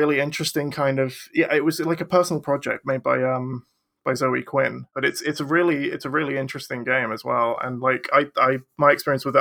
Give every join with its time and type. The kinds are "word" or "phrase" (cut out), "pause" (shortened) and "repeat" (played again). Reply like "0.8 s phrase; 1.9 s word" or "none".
none